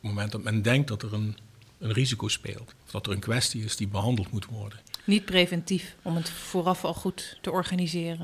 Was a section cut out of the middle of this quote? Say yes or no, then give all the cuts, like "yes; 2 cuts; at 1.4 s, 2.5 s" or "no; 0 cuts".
yes; 1 cut; at 2.8 s